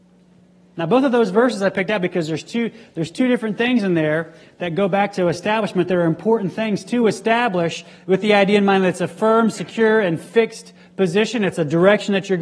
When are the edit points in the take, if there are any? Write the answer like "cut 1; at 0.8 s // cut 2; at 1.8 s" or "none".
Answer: none